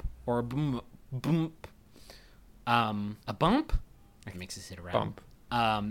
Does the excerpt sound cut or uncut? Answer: cut